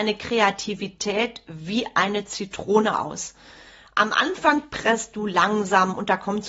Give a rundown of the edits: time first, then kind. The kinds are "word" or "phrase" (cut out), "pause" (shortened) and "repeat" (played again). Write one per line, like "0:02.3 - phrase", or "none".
none